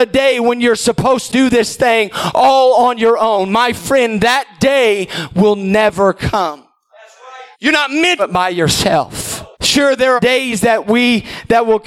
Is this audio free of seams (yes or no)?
no